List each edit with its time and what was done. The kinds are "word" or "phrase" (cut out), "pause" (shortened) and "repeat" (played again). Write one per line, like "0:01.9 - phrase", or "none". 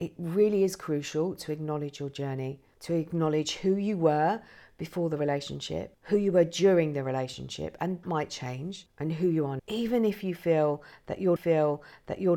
0:08.0 - word
0:09.6 - word
0:11.4 - repeat